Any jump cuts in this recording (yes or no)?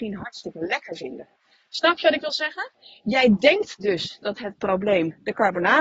no